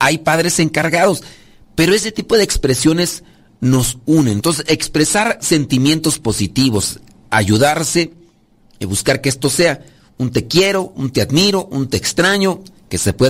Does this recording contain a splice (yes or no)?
no